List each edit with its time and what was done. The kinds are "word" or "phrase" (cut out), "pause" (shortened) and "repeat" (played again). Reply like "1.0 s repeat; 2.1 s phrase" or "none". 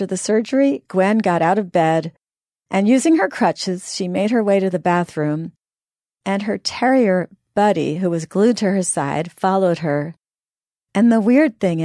none